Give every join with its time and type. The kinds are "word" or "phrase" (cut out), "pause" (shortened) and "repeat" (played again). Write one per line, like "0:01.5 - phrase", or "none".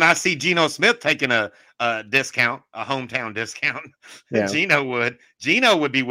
none